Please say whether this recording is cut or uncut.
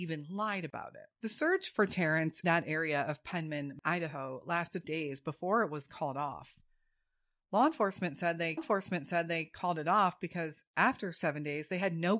cut